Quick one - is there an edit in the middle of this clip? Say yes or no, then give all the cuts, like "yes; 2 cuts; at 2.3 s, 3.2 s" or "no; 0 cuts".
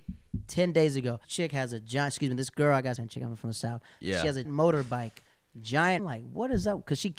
yes; 4 cuts; at 1.2 s, 3.0 s, 4.4 s, 6.0 s